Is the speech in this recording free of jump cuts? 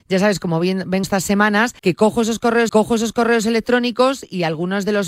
no; 3 cuts; at 1.0 s, 1.8 s, 2.7 s

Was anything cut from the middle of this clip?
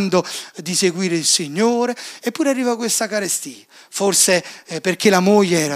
no; 0 cuts

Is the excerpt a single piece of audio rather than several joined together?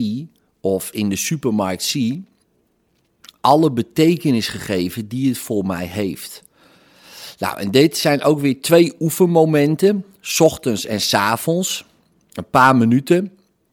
yes; 0 cuts

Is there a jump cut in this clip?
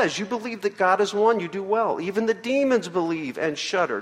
no; 0 cuts

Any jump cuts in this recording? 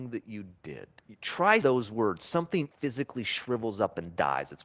yes; 3 cuts; at 1.0 s, 1.6 s, 2.7 s

